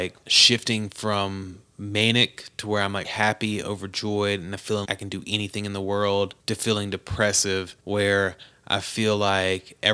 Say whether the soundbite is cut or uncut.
cut